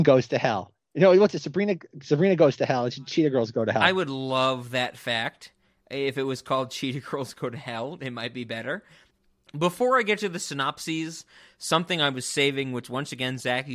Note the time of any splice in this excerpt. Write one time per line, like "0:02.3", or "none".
none